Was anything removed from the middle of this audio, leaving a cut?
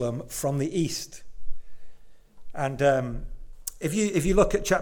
no; 0 cuts

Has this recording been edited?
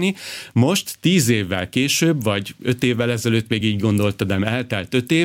no; 0 cuts

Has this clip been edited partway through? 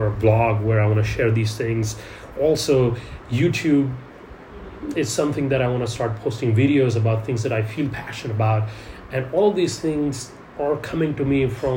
yes; 1 cut; at 4.9 s

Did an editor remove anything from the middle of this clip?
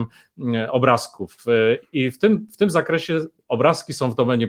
no; 0 cuts

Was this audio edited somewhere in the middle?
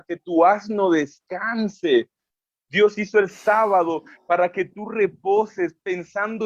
no; 0 cuts

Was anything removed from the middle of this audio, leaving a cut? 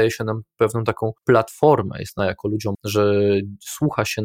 yes; 3 cuts; at 1.2 s, 2.2 s, 2.7 s

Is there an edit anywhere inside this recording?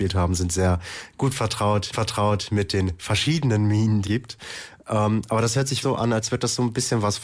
yes; 3 cuts; at 1.9 s, 4.0 s, 5.8 s

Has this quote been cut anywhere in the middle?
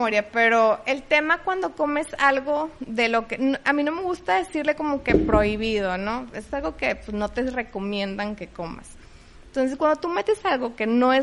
no; 0 cuts

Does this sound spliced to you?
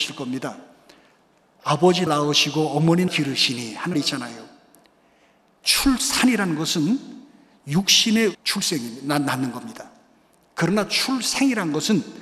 yes; 4 cuts; at 2.1 s, 3.1 s, 3.9 s, 8.3 s

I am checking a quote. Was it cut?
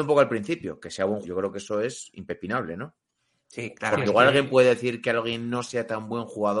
yes; 1 cut; at 1.2 s

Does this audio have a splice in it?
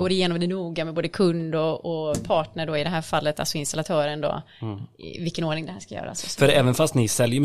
no; 0 cuts

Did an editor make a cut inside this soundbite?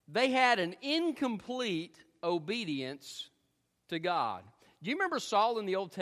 no; 0 cuts

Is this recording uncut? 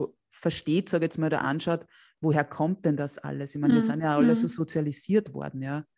yes; 0 cuts

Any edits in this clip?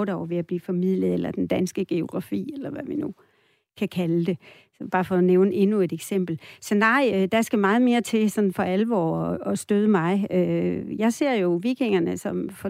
no; 0 cuts

